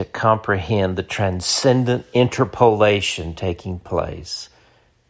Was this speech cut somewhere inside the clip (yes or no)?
no